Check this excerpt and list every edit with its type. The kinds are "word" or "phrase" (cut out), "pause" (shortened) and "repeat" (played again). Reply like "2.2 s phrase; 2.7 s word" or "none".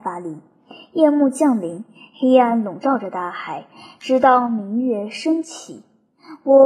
none